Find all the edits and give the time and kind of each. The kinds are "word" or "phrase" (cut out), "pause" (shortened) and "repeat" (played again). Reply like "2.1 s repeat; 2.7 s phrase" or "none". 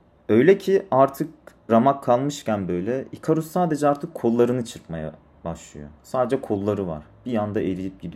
1.7 s word

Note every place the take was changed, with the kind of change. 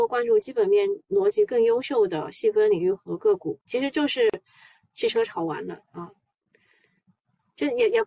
3.6 s pause; 5.8 s pause

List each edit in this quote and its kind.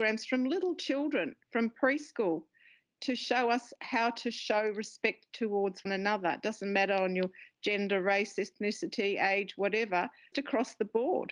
5.9 s word; 10.3 s word

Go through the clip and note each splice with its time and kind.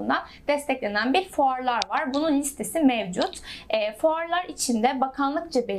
none

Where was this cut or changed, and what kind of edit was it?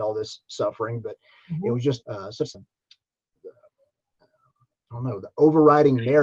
2.0 s phrase; 2.5 s word

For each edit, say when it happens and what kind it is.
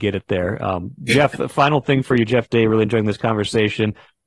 none

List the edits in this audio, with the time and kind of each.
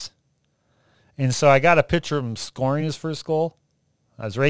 none

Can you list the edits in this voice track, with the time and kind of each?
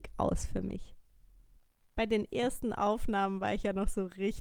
none

